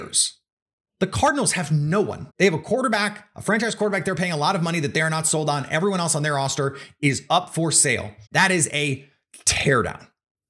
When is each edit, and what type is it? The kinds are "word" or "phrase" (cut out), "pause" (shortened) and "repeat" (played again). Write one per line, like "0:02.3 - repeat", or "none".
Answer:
0:02.3 - pause
0:08.3 - pause